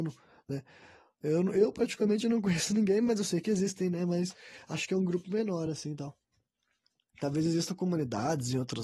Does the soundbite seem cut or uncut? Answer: uncut